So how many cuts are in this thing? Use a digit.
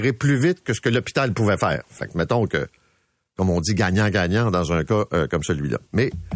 0